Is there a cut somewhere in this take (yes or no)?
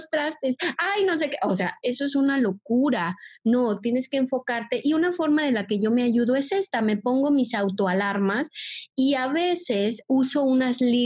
no